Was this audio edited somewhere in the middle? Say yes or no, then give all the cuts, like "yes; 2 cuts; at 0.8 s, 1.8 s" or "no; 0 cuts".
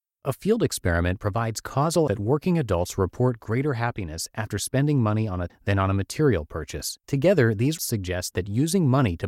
yes; 4 cuts; at 2.1 s, 5.5 s, 7.0 s, 7.8 s